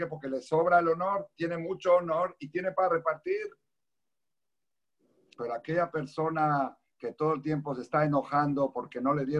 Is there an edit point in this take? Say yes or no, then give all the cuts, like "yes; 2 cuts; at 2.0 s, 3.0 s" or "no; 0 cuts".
no; 0 cuts